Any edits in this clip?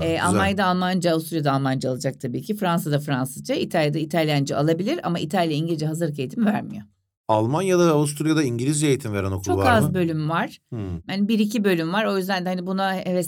no; 0 cuts

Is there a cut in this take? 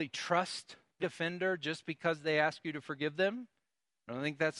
yes; 1 cut; at 1.0 s

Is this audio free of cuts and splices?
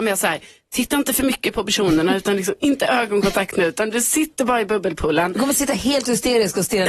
yes; 0 cuts

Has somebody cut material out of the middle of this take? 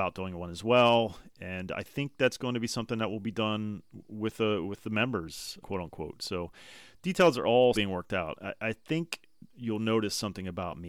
yes; 3 cuts; at 5.6 s, 7.7 s, 9.5 s

